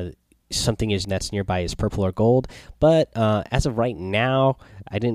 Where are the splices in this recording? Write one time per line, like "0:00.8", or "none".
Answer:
0:01.0